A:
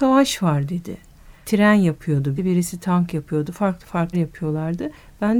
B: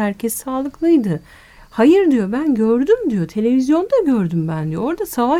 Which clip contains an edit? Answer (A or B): A